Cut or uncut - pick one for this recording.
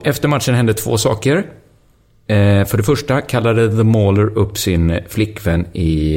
uncut